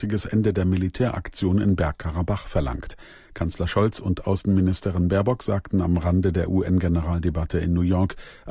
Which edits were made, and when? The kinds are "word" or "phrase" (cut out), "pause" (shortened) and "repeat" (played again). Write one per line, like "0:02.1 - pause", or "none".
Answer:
none

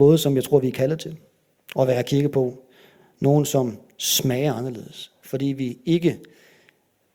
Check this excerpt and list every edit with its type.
none

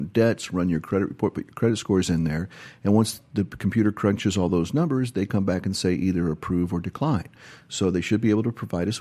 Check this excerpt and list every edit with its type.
none

